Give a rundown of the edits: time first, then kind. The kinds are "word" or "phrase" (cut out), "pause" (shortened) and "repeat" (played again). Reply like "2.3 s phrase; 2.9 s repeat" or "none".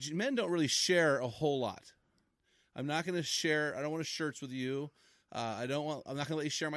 4.0 s word